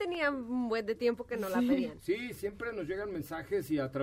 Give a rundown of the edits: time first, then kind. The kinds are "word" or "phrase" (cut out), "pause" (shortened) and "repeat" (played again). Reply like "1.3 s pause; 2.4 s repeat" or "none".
2.3 s word

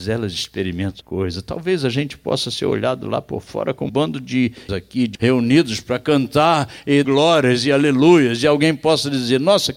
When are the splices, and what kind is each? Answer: 1.0 s word; 3.9 s word; 4.7 s word; 5.1 s word; 7.0 s word

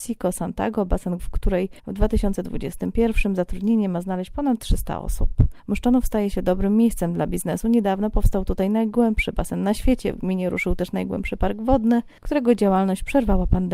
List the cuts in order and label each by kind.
1.2 s phrase; 1.8 s pause; 5.6 s pause

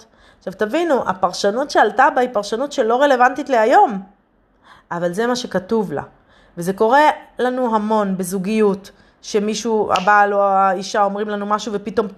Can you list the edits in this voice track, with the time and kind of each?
none

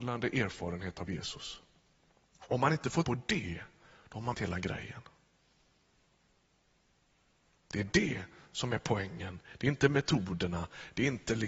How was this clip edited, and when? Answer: 3.0 s word; 4.3 s word

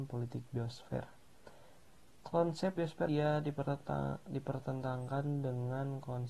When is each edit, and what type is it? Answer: 2.8 s word; 3.1 s word

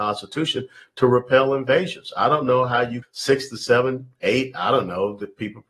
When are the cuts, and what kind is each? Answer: 3.0 s word

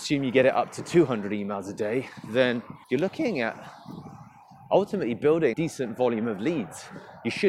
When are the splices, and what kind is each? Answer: 2.8 s pause; 5.5 s phrase

